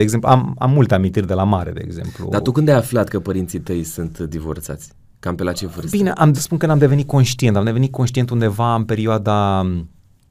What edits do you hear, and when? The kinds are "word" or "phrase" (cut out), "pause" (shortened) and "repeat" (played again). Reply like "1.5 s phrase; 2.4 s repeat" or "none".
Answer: 6.3 s phrase